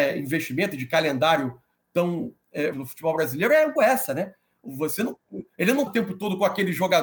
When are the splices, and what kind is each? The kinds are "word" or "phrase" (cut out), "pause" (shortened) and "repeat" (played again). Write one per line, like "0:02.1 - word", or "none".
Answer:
0:02.7 - word
0:03.8 - word
0:05.9 - word